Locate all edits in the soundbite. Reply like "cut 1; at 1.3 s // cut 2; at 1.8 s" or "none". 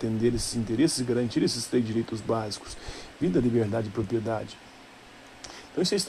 none